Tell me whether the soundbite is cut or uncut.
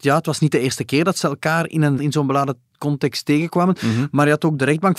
cut